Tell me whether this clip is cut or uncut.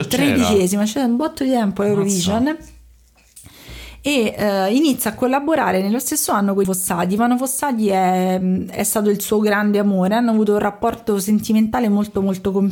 cut